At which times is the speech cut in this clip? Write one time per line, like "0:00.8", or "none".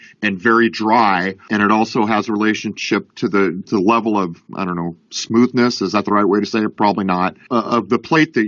0:03.7